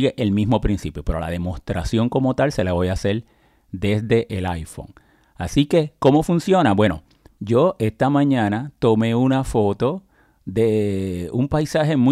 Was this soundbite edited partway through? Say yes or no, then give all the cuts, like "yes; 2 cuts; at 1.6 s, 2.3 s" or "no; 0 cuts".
no; 0 cuts